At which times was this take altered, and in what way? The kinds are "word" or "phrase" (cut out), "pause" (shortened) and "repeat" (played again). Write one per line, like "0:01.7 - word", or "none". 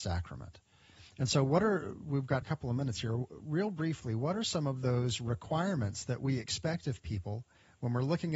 0:02.4 - word